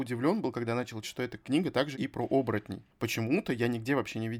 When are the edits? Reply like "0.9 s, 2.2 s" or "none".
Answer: 1.0 s, 1.4 s, 1.9 s